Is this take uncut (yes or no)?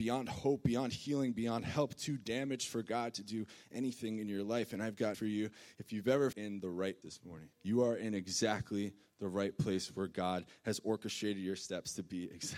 no